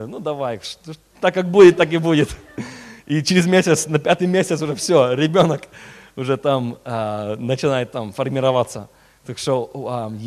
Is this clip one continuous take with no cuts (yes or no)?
yes